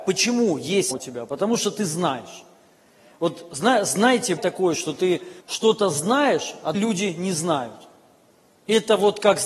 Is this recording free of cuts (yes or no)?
no